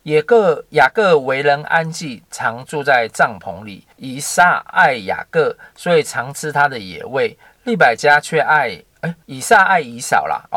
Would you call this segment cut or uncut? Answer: cut